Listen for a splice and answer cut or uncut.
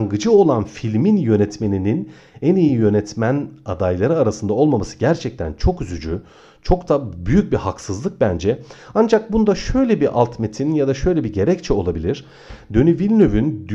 uncut